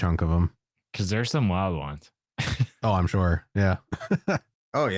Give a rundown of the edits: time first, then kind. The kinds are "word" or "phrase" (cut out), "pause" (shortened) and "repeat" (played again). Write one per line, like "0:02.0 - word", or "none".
none